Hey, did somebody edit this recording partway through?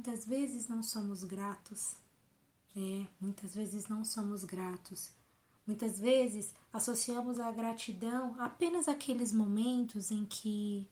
no; 0 cuts

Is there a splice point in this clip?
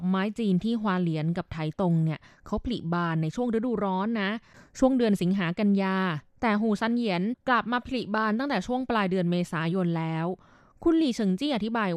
no; 0 cuts

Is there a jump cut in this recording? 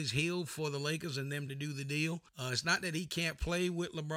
yes; 2 cuts; at 1.5 s, 2.3 s

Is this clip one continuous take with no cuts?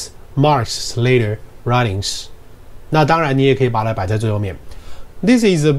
yes; 0 cuts

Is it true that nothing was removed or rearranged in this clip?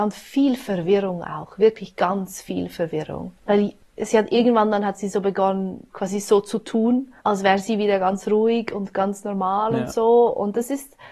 no; 3 cuts; at 3.4 s, 5.9 s, 7.2 s

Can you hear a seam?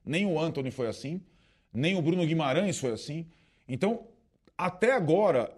no; 0 cuts

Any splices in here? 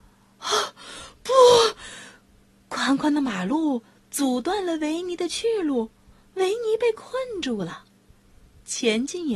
no; 0 cuts

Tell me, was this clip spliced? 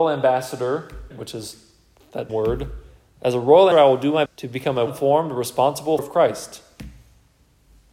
yes; 6 cuts; at 1.1 s, 2.3 s, 3.7 s, 4.3 s, 4.9 s, 6.0 s

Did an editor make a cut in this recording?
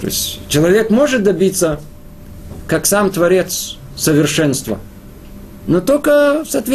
no; 0 cuts

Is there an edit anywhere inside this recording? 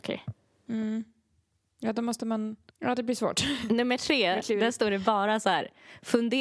no; 0 cuts

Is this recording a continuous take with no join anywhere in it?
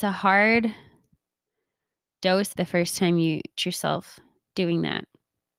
no; 2 cuts; at 2.5 s, 3.6 s

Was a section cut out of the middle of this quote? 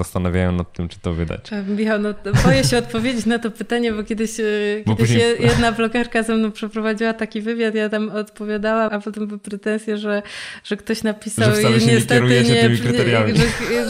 yes; 1 cut; at 8.9 s

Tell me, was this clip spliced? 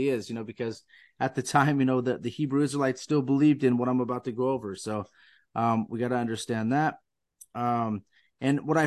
no; 0 cuts

